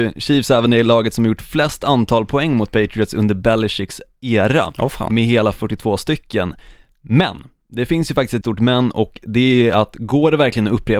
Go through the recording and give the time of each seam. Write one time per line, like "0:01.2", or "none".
0:08.4